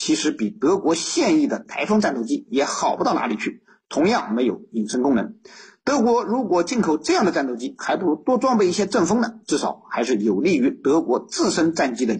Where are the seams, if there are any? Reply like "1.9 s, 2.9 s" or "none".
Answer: none